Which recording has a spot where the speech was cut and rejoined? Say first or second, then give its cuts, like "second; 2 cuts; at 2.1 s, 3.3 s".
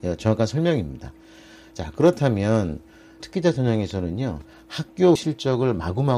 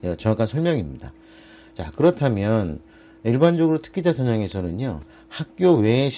first; 2 cuts; at 3.2 s, 5.2 s